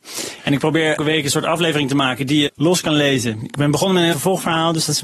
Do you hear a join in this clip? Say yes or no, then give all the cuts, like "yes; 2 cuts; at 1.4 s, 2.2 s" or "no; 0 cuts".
yes; 3 cuts; at 1.0 s, 2.5 s, 4.1 s